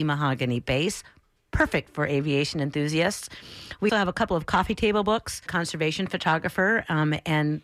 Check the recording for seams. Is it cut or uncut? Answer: cut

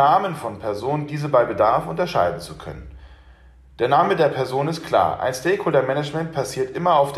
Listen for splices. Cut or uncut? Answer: uncut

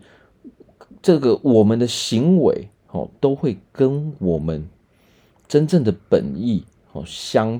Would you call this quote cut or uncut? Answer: uncut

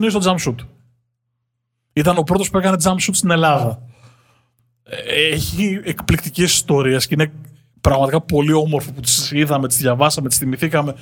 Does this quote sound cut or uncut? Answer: uncut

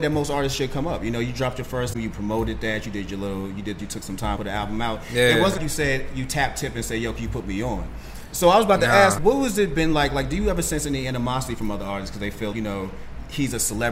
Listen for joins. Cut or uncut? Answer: cut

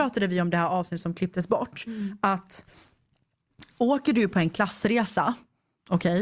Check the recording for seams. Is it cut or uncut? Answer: uncut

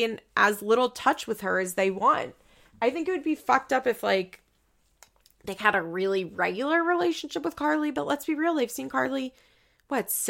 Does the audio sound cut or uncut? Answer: uncut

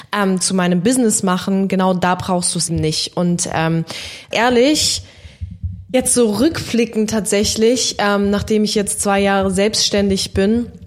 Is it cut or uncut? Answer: cut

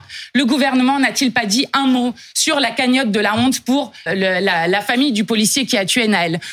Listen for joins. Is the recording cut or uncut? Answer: cut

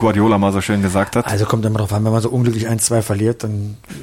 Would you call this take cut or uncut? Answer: uncut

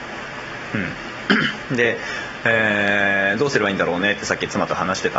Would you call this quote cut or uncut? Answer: uncut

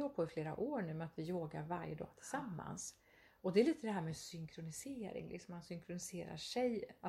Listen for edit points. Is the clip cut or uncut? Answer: uncut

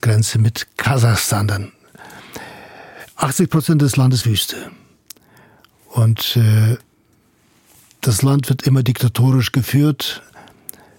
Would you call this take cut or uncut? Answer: cut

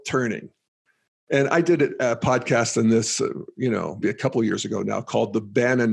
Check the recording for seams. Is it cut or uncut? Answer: cut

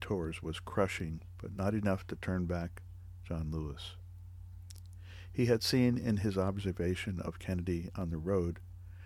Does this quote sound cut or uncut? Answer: uncut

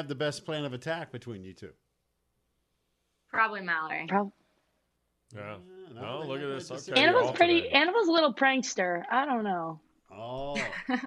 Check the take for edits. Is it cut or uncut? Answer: uncut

